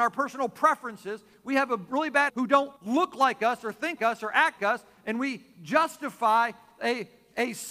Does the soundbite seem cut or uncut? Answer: cut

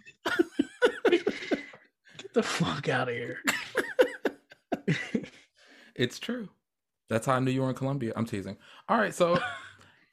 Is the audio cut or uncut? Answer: cut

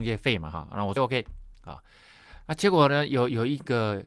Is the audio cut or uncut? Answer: cut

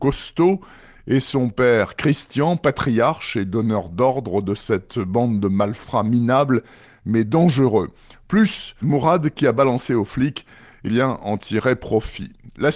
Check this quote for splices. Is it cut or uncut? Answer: cut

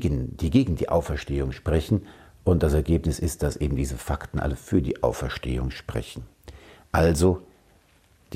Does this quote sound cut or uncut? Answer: uncut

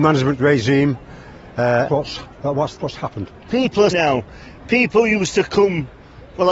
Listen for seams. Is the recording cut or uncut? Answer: cut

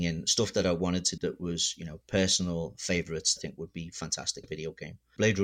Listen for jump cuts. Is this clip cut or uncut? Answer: cut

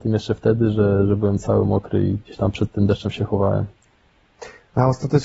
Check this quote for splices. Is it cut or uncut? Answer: uncut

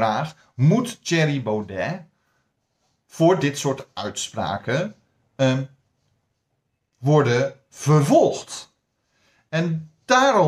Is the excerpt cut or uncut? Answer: uncut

